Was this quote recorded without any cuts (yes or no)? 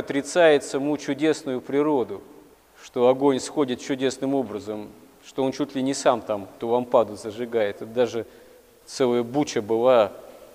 yes